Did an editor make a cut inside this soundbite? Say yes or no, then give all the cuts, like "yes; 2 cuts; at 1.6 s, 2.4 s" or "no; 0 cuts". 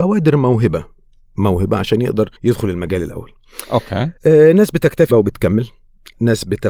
yes; 4 cuts; at 1.3 s, 2.4 s, 4.2 s, 5.1 s